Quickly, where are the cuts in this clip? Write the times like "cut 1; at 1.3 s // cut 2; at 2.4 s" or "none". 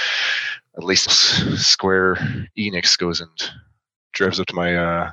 cut 1; at 1.1 s